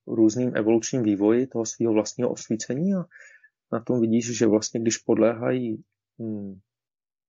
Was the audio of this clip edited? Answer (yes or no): no